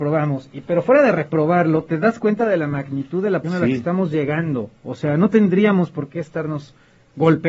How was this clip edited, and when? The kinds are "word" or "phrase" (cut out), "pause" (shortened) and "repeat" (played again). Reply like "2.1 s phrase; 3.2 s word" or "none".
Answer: 3.4 s word